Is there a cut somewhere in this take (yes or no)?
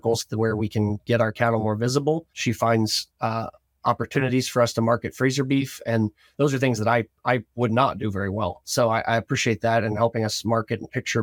yes